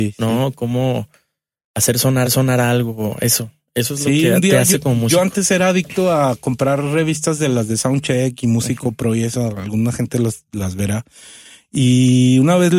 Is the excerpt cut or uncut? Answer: cut